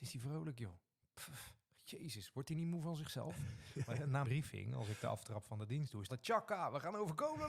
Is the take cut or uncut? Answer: cut